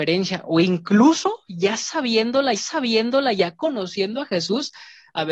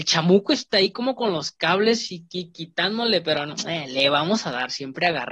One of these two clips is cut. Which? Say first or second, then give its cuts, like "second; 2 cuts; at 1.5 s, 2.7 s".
first; 1 cut; at 2.5 s